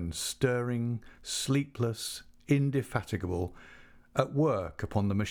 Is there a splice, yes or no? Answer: no